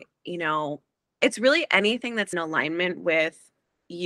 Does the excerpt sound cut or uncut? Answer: cut